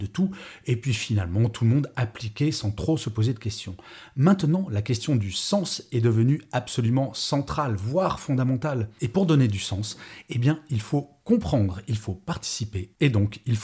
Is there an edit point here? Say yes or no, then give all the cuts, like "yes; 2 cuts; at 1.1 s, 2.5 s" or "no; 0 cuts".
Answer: no; 0 cuts